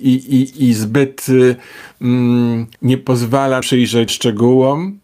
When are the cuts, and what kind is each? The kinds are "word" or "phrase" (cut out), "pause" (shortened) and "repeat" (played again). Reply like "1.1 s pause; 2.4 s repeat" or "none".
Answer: 2.7 s pause; 3.6 s word; 4.1 s word